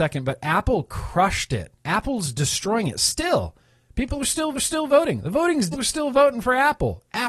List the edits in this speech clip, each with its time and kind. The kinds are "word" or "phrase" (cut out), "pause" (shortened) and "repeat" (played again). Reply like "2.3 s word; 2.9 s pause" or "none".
1.8 s pause; 4.5 s repeat; 5.7 s phrase